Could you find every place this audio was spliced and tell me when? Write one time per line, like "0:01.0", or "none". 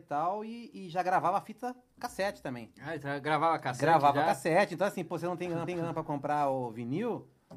0:05.7